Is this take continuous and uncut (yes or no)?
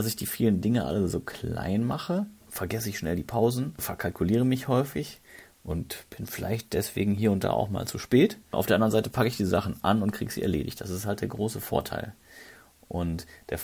yes